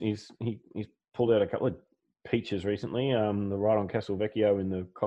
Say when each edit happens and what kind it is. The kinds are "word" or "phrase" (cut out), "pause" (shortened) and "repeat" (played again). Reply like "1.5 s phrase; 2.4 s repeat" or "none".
none